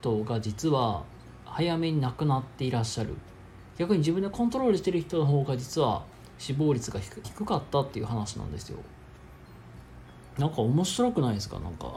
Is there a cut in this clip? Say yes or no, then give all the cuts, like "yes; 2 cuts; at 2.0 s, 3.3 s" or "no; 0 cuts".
yes; 1 cut; at 7.2 s